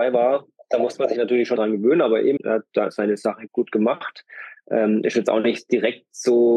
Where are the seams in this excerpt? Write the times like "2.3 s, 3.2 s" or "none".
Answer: 1.6 s, 2.4 s, 3.5 s